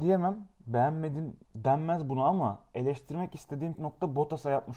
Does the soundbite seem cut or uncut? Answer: cut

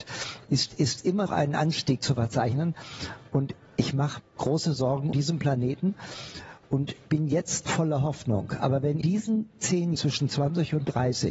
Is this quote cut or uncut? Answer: cut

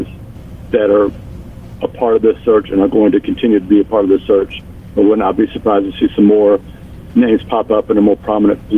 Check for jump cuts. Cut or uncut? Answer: uncut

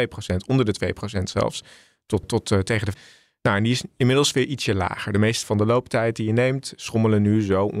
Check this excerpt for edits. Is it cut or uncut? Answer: cut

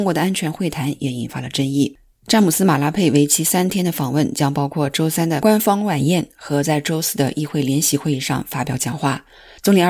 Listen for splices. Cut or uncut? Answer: uncut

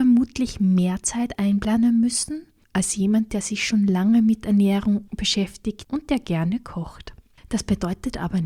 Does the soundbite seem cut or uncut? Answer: uncut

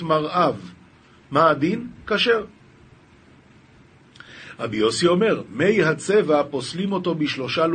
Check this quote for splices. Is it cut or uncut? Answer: uncut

